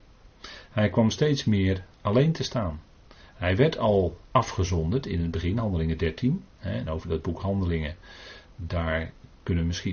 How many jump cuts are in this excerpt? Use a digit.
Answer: 4